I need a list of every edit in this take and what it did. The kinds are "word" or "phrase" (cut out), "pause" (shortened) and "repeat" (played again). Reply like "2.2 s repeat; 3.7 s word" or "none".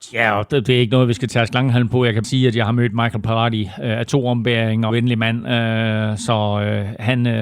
2.2 s word; 4.9 s phrase